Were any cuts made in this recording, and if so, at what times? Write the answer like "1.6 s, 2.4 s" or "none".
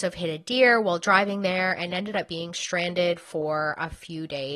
none